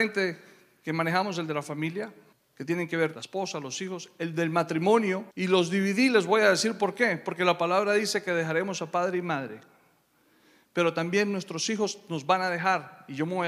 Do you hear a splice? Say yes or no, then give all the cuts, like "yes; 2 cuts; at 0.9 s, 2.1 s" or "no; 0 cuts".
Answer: yes; 3 cuts; at 2.3 s, 3.1 s, 5.3 s